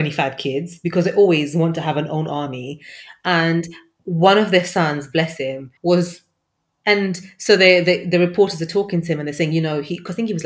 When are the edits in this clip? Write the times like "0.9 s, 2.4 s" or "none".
5.8 s